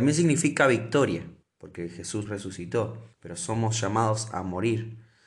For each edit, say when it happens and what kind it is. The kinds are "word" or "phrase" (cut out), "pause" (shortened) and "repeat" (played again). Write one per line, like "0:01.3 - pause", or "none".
0:01.4 - pause
0:02.3 - phrase
0:03.1 - pause